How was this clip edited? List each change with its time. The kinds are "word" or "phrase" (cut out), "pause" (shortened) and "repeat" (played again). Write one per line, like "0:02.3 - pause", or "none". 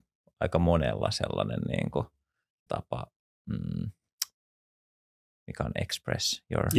0:02.7 - word